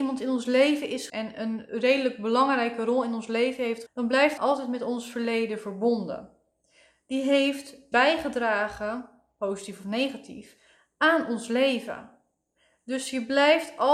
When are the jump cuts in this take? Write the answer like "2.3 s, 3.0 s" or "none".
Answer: 1.1 s, 3.9 s, 4.4 s, 7.9 s